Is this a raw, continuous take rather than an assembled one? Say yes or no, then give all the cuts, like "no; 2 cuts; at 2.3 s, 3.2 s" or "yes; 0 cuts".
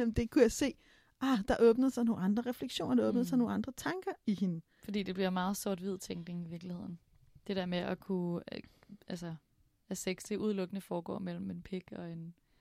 yes; 0 cuts